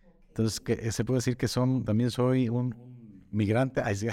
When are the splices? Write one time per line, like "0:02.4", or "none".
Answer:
0:01.8